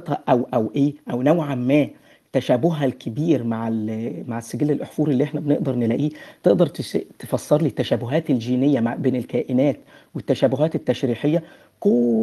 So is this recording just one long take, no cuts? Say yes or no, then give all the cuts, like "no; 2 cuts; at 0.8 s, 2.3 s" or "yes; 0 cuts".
yes; 0 cuts